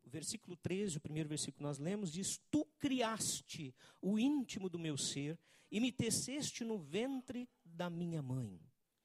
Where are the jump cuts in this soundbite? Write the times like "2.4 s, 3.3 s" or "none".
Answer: none